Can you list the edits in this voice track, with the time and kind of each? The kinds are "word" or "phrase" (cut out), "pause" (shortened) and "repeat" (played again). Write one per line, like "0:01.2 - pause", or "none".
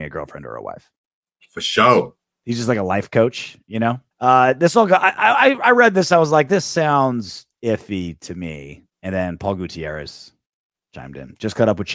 0:04.1 - pause
0:08.9 - pause